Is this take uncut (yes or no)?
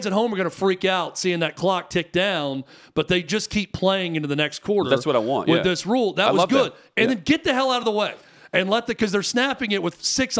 yes